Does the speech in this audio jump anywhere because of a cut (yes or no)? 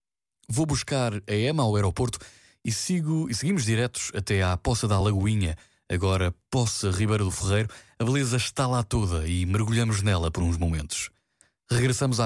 no